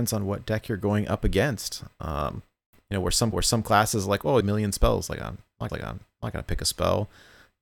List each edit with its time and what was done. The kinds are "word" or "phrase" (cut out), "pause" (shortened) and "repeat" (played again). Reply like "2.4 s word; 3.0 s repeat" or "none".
3.3 s repeat; 4.4 s phrase; 5.7 s repeat